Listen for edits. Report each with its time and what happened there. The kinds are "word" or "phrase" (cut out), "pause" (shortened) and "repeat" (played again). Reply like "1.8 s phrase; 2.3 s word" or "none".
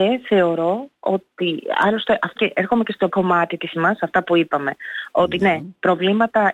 2.4 s word; 3.1 s word; 3.7 s word